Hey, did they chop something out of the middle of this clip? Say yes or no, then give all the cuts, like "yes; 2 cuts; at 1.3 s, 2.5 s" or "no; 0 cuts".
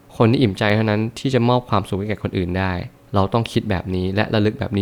no; 0 cuts